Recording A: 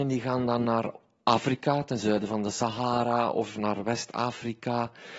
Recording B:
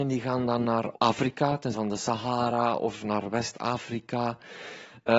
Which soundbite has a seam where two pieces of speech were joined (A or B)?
B